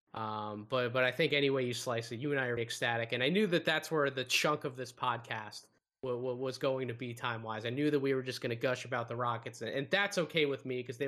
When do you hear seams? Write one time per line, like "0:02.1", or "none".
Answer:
0:02.6